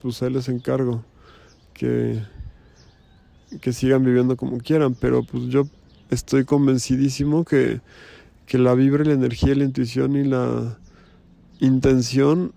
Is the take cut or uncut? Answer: uncut